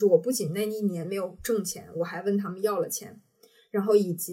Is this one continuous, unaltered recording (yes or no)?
yes